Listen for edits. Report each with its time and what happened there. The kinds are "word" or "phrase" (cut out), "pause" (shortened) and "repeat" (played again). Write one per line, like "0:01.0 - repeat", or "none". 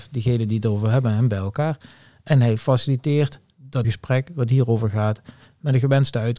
0:03.8 - word